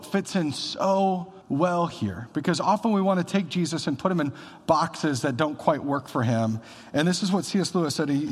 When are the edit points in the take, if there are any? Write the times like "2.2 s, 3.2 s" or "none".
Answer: 1.4 s